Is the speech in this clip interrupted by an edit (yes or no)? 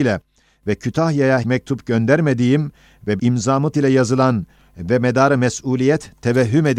yes